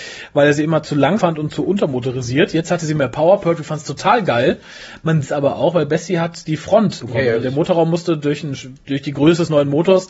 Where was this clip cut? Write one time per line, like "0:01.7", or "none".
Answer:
0:01.2
0:05.2
0:07.0
0:07.4